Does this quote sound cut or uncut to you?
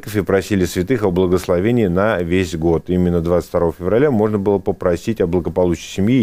uncut